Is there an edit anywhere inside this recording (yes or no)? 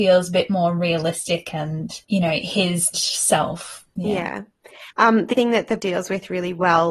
yes